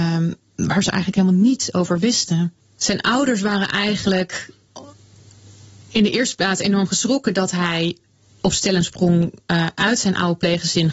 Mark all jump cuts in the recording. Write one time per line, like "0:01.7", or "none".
none